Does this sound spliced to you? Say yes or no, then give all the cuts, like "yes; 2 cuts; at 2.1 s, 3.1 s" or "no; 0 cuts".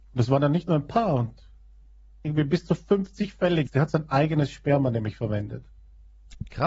yes; 1 cut; at 3.7 s